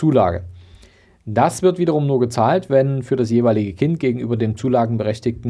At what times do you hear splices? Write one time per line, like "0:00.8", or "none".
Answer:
none